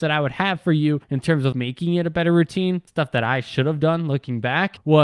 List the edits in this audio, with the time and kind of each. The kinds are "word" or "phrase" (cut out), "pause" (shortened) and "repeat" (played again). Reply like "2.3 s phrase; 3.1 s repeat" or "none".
1.0 s pause; 1.5 s word